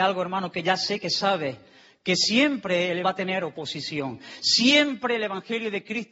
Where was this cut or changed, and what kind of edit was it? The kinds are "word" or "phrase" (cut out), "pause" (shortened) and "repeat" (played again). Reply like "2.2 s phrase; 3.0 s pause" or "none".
3.0 s phrase

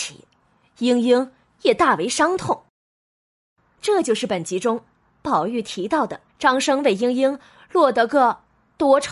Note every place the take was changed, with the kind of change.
6.3 s pause

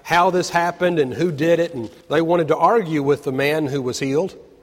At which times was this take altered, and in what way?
2.0 s pause

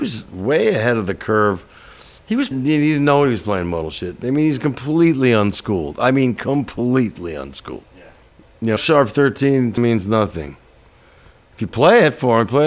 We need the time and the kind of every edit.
2.5 s phrase; 7.9 s pause; 8.8 s word; 9.8 s word

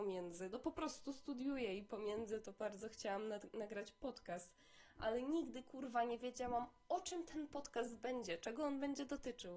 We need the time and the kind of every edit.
none

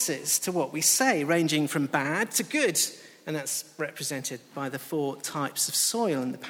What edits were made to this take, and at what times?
none

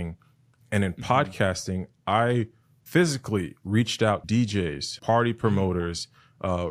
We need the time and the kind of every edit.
4.2 s word; 5.0 s word

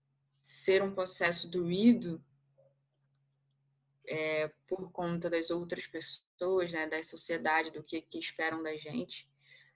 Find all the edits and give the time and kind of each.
none

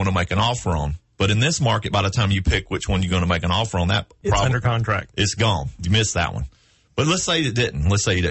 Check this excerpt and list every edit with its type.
none

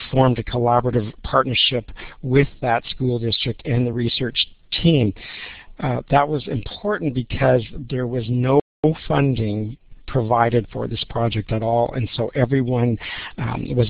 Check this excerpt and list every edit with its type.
none

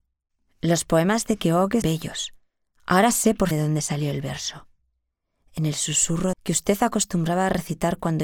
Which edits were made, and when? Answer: 1.8 s word; 3.5 s word; 6.3 s phrase

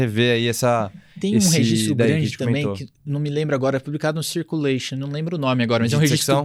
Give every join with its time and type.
3.8 s word

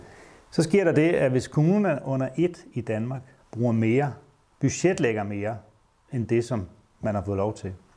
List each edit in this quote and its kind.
none

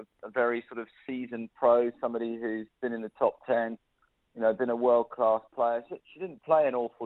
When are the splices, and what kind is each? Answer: 6.0 s word

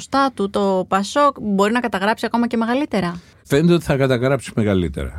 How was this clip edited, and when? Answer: none

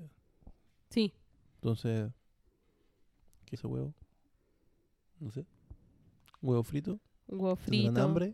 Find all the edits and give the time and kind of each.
3.5 s word

